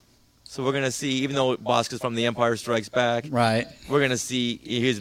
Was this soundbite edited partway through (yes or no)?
no